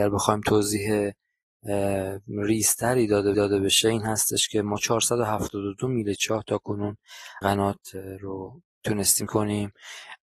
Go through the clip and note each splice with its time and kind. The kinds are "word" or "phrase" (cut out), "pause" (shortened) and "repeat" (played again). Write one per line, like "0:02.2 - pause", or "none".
0:03.3 - repeat
0:07.4 - phrase
0:09.3 - word